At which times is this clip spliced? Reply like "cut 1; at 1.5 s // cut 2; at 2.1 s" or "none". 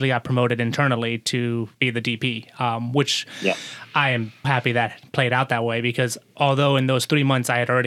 cut 1; at 1.7 s // cut 2; at 4.4 s